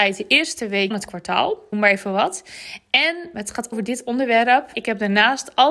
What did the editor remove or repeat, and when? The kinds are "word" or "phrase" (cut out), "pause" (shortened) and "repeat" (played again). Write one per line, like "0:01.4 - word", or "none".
0:00.9 - word
0:01.7 - word
0:03.3 - word
0:03.7 - word
0:04.7 - word